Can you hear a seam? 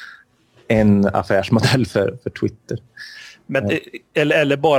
no; 0 cuts

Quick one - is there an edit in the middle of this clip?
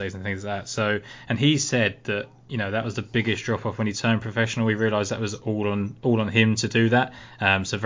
no; 0 cuts

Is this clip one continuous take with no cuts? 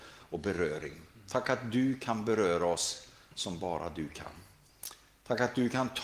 yes; 0 cuts

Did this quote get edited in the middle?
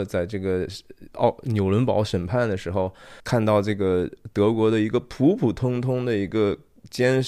yes; 1 cut; at 3.2 s

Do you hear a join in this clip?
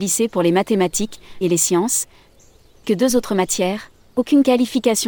yes; 2 cuts; at 1.4 s, 2.8 s

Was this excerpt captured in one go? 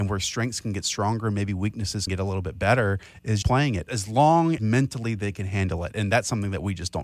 no; 4 cuts; at 2.1 s, 3.4 s, 3.9 s, 4.6 s

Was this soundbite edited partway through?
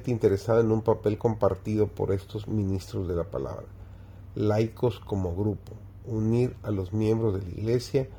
no; 0 cuts

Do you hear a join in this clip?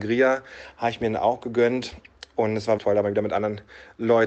yes; 1 cut; at 2.8 s

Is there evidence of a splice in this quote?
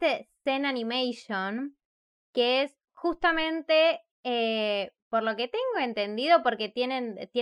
no; 0 cuts

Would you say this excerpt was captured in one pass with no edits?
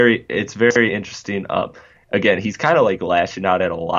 yes; 0 cuts

